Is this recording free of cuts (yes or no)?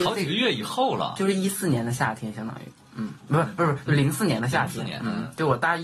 yes